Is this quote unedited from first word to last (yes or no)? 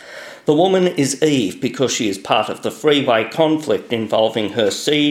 yes